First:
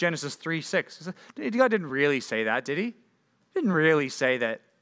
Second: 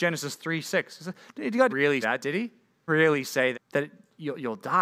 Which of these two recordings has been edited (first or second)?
second